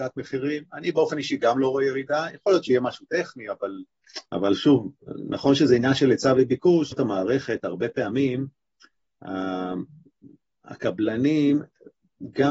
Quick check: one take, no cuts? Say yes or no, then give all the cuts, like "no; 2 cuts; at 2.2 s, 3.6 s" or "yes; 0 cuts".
no; 2 cuts; at 4.3 s, 6.9 s